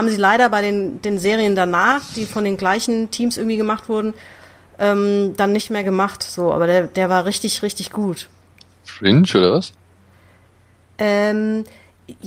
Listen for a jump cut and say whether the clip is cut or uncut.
uncut